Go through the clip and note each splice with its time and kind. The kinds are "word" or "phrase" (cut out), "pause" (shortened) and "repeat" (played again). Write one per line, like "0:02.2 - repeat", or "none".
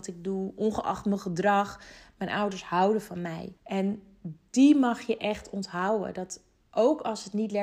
0:03.6 - pause